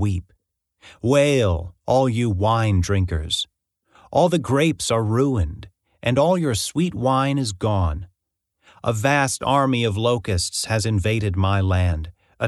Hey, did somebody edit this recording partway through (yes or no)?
no